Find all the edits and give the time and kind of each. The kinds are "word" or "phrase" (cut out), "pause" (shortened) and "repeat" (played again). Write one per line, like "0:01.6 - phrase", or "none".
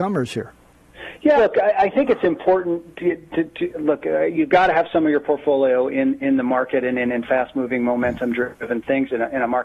0:01.4 - word